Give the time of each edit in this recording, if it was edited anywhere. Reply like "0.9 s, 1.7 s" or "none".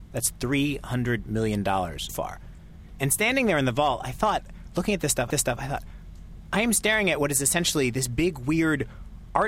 2.1 s, 5.3 s